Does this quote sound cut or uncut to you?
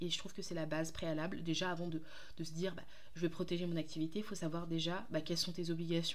uncut